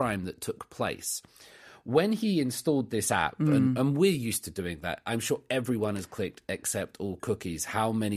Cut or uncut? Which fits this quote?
uncut